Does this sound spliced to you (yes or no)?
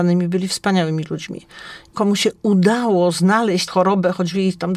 yes